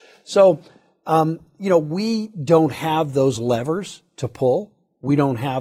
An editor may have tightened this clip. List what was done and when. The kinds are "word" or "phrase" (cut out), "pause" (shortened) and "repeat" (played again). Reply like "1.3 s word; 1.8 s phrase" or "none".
none